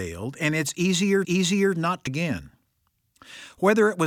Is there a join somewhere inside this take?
yes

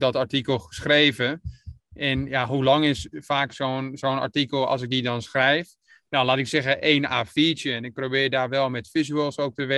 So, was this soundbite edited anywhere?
no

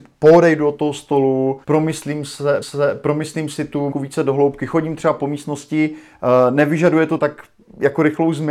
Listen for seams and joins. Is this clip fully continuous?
no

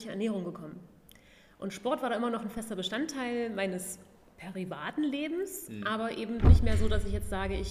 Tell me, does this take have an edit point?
no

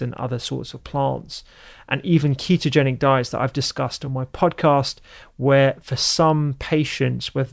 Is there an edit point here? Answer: no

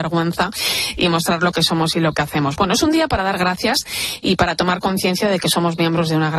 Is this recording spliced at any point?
no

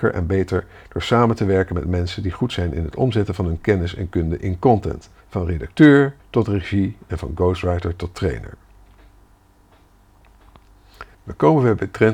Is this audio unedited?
no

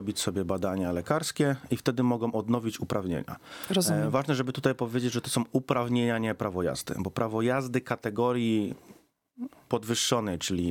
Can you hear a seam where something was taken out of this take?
no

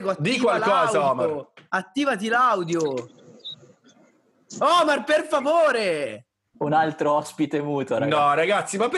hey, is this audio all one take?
yes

